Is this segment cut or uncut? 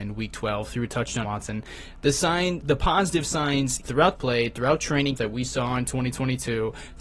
cut